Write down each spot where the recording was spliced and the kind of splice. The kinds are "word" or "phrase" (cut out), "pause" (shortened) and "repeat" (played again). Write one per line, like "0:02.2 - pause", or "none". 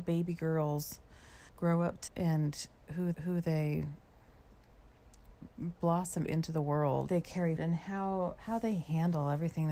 0:01.5 - pause
0:02.1 - word
0:03.1 - repeat
0:06.3 - word
0:07.1 - phrase
0:07.6 - word